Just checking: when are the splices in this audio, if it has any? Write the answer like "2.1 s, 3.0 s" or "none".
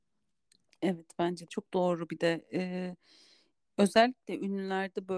1.5 s